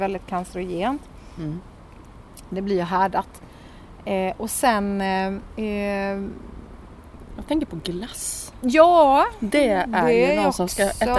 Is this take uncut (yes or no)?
yes